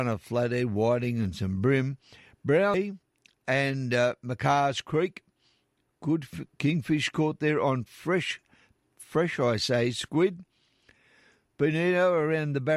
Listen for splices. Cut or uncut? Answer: uncut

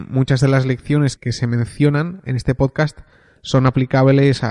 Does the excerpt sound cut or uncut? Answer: cut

